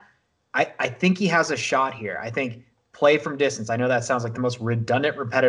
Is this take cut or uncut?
uncut